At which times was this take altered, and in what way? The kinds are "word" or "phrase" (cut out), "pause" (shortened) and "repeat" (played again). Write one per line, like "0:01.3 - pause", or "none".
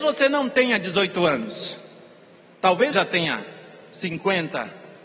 0:02.9 - word